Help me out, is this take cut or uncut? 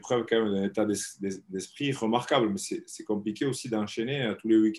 uncut